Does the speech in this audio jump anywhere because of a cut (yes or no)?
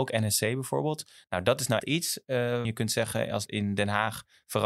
yes